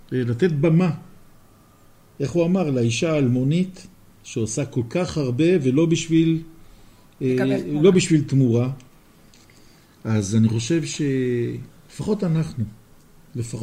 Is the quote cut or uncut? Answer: uncut